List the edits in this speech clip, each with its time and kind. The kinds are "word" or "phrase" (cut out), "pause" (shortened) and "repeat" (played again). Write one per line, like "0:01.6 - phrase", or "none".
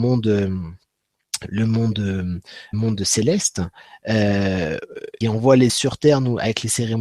0:02.7 - word
0:05.2 - word
0:05.7 - word